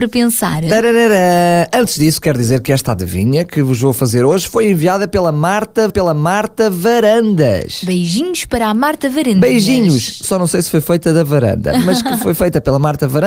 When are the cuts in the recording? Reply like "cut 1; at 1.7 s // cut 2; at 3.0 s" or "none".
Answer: cut 1; at 5.9 s